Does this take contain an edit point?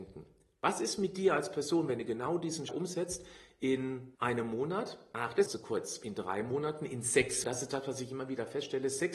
yes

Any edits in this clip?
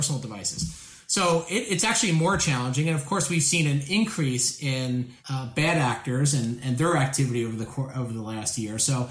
yes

